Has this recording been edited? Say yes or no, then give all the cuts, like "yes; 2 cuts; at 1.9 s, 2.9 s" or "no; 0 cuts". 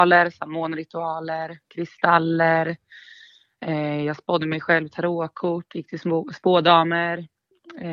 no; 0 cuts